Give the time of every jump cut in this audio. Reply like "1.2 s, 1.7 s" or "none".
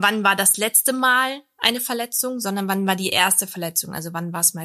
none